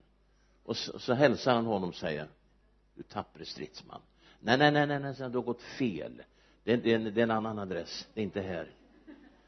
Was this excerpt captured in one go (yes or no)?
yes